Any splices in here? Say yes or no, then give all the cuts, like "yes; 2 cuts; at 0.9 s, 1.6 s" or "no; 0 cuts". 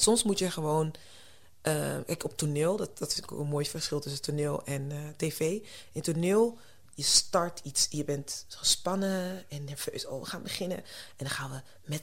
no; 0 cuts